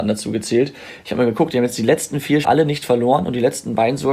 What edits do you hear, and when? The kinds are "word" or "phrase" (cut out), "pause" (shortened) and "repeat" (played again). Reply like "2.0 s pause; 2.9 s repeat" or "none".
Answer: 2.4 s word